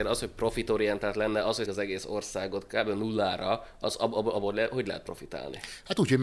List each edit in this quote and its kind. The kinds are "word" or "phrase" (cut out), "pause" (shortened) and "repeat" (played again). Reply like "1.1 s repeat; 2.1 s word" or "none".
1.7 s word